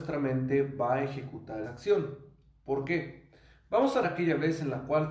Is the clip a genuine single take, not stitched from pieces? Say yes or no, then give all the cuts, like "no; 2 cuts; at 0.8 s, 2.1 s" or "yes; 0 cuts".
no; 2 cuts; at 1.6 s, 4.0 s